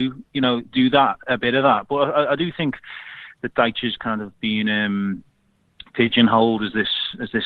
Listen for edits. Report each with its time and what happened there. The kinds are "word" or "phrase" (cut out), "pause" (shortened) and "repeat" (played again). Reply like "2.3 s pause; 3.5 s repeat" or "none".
none